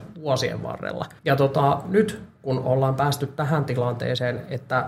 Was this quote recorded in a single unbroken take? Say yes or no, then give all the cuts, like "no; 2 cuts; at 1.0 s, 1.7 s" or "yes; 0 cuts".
no; 1 cut; at 1.2 s